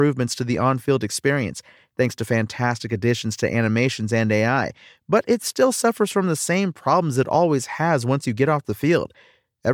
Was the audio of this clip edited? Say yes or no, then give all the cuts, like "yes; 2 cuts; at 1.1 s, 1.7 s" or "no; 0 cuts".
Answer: no; 0 cuts